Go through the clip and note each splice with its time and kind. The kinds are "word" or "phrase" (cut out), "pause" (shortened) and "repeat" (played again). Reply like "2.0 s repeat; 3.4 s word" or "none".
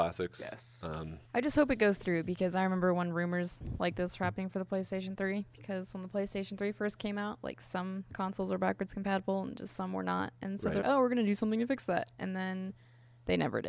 1.2 s pause; 10.8 s word

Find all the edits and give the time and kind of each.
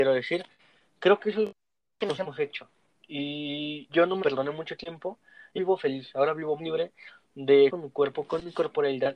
3.9 s word; 4.2 s word; 5.6 s word; 6.6 s word; 7.7 s word

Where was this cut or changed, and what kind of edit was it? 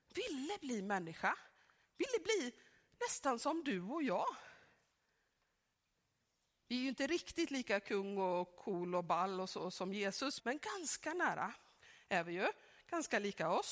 10.4 s word

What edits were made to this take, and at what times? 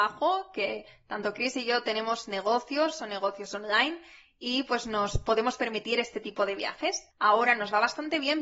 7.1 s pause

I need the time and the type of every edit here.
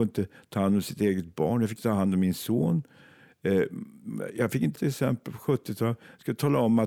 1.8 s word; 4.8 s word

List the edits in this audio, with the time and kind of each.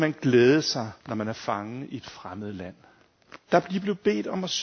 1.0 s pause; 3.4 s pause

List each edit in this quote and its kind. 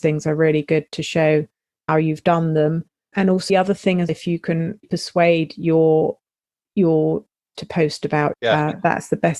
1.9 s word; 3.1 s word; 3.5 s word; 4.1 s word; 4.8 s word; 7.5 s word; 8.3 s word

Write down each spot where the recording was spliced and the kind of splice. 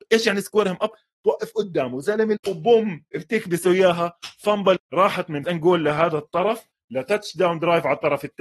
2.4 s word; 4.8 s word; 5.4 s word

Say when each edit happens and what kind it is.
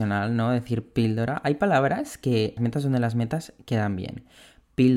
2.6 s word

